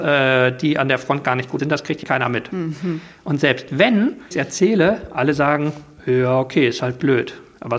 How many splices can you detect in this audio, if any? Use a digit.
3